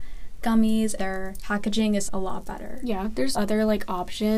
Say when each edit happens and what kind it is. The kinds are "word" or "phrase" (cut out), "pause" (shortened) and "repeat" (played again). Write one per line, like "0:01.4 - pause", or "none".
0:01.0 - word
0:02.1 - word
0:03.3 - word